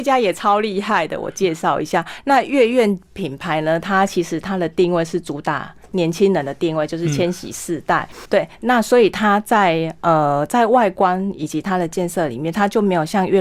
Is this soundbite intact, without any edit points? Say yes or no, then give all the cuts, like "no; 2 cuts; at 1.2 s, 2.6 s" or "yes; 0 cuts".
no; 1 cut; at 8.2 s